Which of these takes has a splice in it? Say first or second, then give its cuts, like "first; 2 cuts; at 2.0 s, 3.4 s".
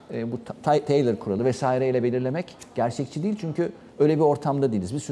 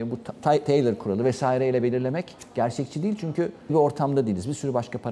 second; 1 cut; at 3.7 s